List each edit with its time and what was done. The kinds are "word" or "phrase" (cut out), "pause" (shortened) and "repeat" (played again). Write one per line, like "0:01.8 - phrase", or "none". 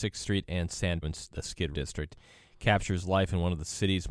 0:01.0 - word
0:01.7 - word